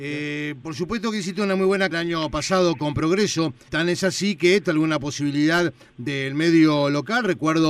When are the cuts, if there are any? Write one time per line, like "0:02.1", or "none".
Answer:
0:01.9
0:03.7
0:04.6